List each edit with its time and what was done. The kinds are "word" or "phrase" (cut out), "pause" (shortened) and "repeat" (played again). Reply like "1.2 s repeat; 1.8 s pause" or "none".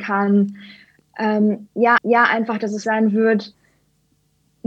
2.0 s repeat; 2.8 s word